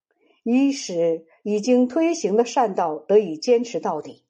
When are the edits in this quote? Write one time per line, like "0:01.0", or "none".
none